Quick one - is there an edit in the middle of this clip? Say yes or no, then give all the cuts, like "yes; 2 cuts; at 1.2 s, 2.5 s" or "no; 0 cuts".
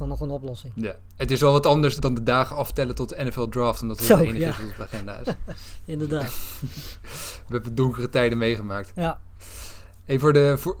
yes; 1 cut; at 2.0 s